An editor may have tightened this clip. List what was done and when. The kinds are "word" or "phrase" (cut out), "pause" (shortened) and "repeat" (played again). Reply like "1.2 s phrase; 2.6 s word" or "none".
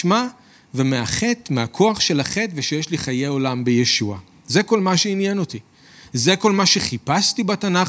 none